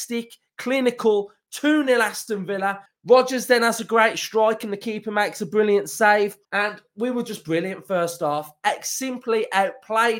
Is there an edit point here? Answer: yes; 2 cuts; at 2.9 s, 6.4 s

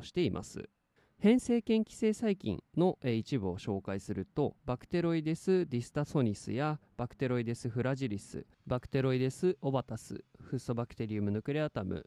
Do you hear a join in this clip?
yes; 3 cuts; at 1.0 s, 4.6 s, 8.5 s

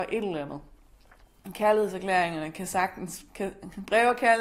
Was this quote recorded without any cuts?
yes; 0 cuts

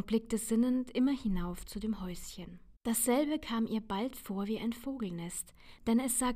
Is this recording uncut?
no; 1 cut; at 2.8 s

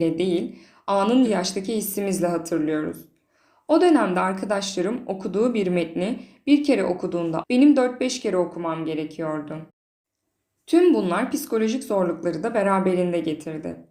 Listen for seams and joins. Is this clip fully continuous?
no; 2 cuts; at 1.2 s, 7.4 s

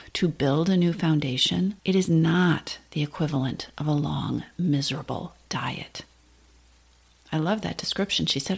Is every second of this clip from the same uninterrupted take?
no; 1 cut; at 1.8 s

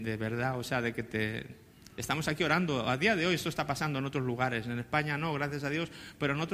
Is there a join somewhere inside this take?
no; 0 cuts

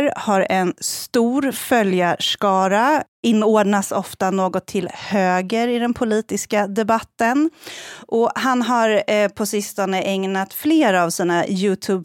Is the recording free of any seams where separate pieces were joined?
yes; 0 cuts

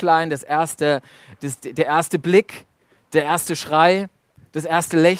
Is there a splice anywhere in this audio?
no; 0 cuts

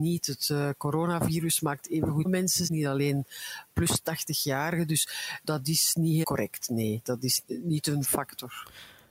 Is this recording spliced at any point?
yes; 6 cuts; at 2.2 s, 2.7 s, 5.4 s, 6.2 s, 7.4 s, 8.0 s

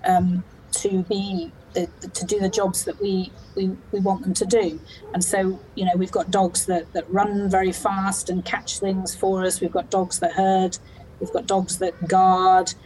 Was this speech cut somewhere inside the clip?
no; 0 cuts

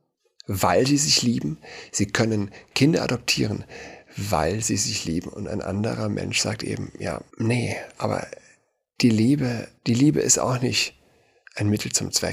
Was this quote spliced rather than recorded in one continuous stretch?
yes; 2 cuts; at 7.3 s, 9.8 s

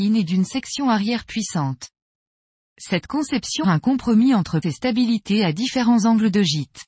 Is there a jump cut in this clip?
yes; 2 cuts; at 3.6 s, 4.6 s

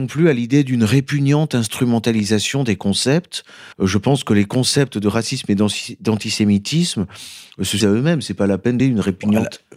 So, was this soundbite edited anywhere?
yes; 3 cuts; at 3.7 s, 7.8 s, 8.8 s

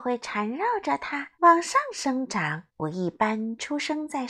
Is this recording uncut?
no; 2 cuts; at 1.3 s, 2.7 s

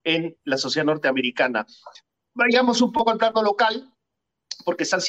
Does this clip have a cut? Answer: no; 0 cuts

